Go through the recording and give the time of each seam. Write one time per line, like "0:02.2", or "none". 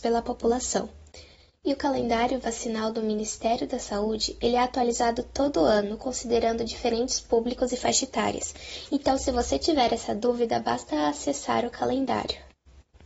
none